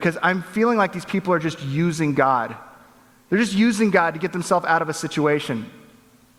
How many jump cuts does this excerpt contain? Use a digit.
0